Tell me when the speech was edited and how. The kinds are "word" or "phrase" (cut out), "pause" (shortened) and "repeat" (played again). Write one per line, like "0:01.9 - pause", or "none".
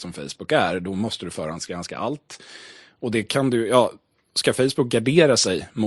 none